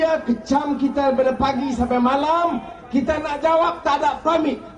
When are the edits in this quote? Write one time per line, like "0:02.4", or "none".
none